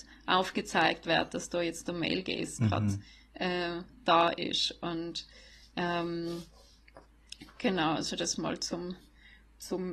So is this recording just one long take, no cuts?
yes; 0 cuts

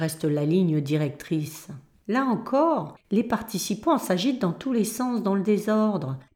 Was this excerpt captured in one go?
yes; 0 cuts

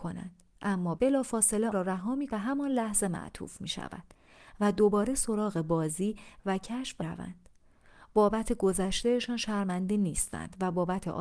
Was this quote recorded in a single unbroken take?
no; 4 cuts; at 1.0 s, 1.7 s, 2.3 s, 7.0 s

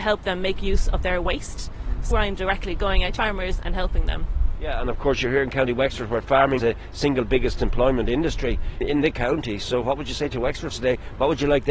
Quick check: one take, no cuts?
no; 5 cuts; at 2.1 s, 3.2 s, 6.6 s, 8.8 s, 10.7 s

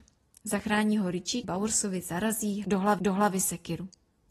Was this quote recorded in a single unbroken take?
no; 2 cuts; at 1.4 s, 3.0 s

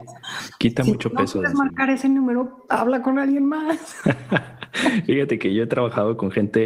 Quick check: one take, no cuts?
no; 1 cut; at 2.7 s

